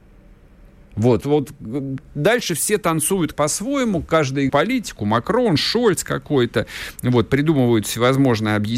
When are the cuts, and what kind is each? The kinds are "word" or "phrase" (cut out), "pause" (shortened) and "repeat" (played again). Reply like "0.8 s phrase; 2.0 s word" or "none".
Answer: 1.2 s word; 3.3 s word; 4.5 s phrase